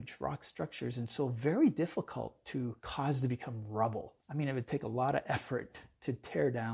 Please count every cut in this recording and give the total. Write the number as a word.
two